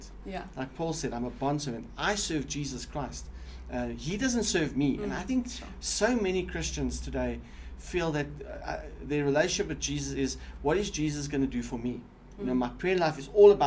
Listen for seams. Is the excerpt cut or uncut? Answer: uncut